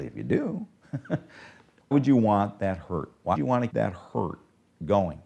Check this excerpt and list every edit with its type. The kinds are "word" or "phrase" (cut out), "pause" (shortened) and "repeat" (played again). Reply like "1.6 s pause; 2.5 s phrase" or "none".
1.9 s word; 3.3 s word; 3.7 s word